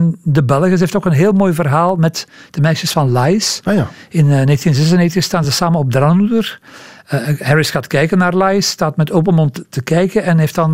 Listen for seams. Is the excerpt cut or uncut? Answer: uncut